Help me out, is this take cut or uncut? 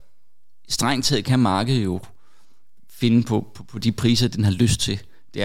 uncut